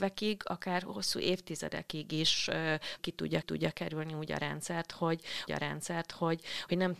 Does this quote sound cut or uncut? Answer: cut